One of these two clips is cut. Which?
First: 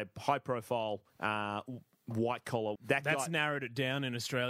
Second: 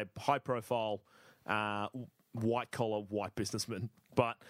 first; 2 cuts; at 1.1 s, 2.8 s

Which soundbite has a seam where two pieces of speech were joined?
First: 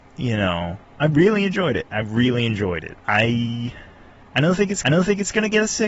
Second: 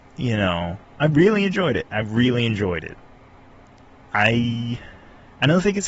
first; 2 cuts; at 3.0 s, 4.8 s

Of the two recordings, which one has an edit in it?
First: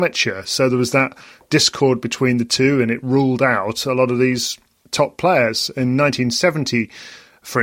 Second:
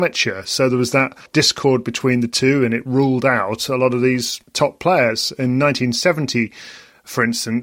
second; 2 cuts; at 1.3 s, 4.4 s

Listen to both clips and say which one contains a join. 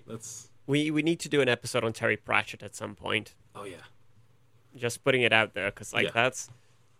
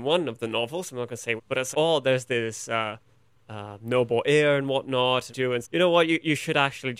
second; 4 cuts; at 1.4 s, 1.7 s, 5.3 s, 5.6 s

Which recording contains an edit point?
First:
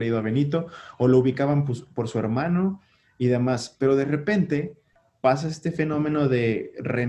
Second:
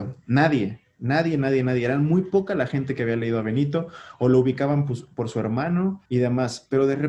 second; 1 cut; at 6.1 s

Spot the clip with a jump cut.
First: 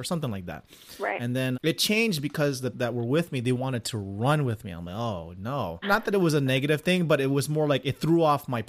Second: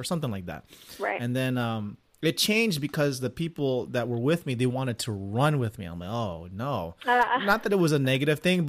first; 3 cuts; at 1.5 s, 2.7 s, 5.8 s

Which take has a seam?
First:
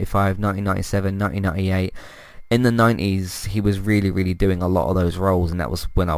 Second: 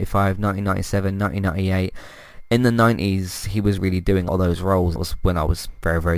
second; 3 cuts; at 3.8 s, 4.3 s, 5.0 s

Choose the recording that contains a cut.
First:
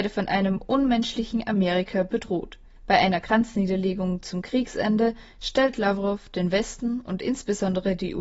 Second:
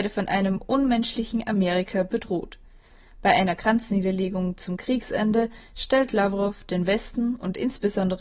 first; 1 cut; at 2.8 s

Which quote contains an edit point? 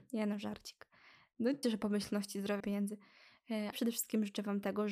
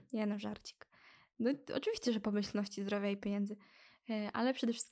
first; 3 cuts; at 1.6 s, 2.6 s, 3.7 s

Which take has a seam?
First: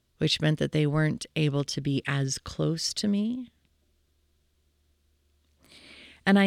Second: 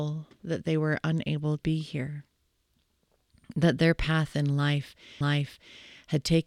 second; 2 cuts; at 1.6 s, 5.2 s

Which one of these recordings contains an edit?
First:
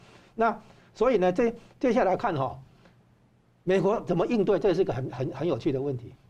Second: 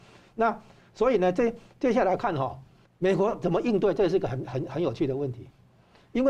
second; 1 cut; at 2.8 s

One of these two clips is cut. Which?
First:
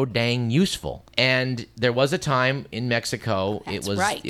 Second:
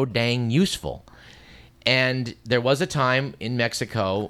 first; 1 cut; at 1.1 s

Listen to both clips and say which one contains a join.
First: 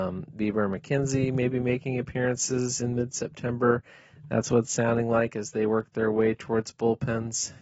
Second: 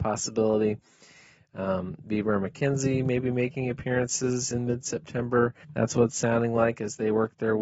second; 1 cut; at 5.6 s

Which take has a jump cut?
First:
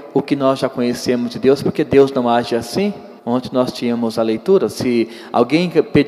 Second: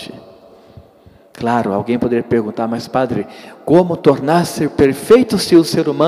first; 1 cut; at 3.2 s

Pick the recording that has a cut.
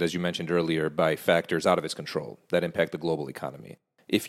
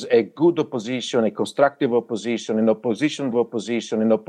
second; 1 cut; at 3.3 s

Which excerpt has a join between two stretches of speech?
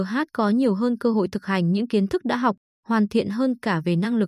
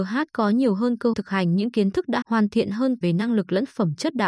second; 3 cuts; at 1.1 s, 2.2 s, 3.0 s

